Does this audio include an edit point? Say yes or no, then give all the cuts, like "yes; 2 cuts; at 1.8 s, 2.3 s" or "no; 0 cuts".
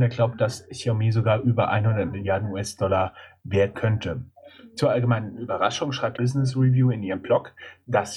yes; 2 cuts; at 3.7 s, 6.2 s